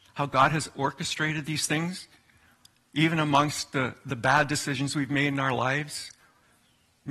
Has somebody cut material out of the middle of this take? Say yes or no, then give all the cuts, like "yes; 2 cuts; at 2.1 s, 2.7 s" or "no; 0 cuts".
no; 0 cuts